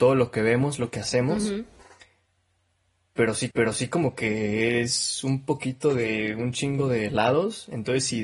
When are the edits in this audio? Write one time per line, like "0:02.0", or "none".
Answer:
0:03.5